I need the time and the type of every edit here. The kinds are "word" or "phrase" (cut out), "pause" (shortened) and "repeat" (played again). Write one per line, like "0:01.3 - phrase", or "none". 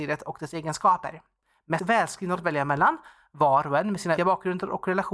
0:01.8 - word
0:02.4 - word
0:04.2 - word